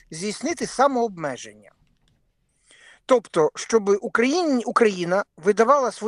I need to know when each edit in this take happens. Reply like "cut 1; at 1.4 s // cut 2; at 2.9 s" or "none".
none